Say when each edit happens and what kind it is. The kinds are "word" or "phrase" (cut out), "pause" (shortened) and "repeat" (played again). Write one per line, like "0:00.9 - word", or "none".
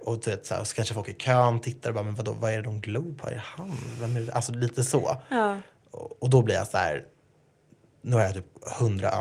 none